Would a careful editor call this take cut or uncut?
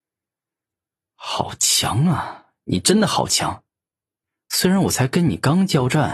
uncut